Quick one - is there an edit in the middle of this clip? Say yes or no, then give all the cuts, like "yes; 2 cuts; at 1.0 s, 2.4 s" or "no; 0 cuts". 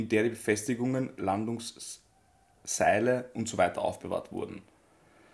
no; 0 cuts